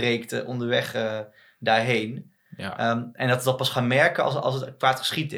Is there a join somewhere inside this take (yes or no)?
no